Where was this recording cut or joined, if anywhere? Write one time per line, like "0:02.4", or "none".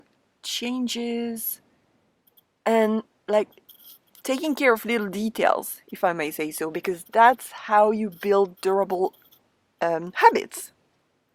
none